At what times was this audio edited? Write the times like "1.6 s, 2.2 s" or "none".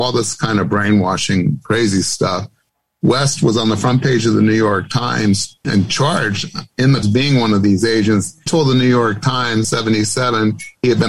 5.6 s, 7.0 s, 8.5 s, 9.6 s